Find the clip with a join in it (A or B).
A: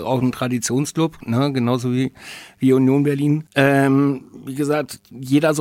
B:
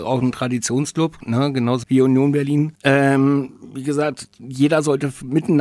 B